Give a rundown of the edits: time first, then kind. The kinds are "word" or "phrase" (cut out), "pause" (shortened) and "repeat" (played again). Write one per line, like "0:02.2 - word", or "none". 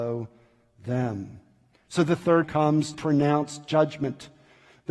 0:02.4 - word
0:02.9 - word